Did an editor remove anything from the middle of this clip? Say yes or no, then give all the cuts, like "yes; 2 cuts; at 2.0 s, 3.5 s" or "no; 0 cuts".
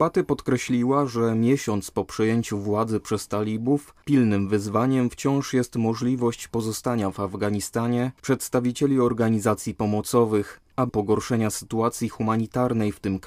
yes; 2 cuts; at 8.2 s, 10.9 s